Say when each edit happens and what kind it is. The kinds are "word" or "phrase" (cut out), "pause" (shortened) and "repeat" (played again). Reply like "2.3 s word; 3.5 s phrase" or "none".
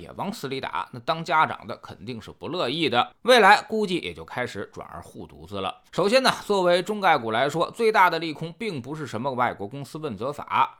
5.9 s pause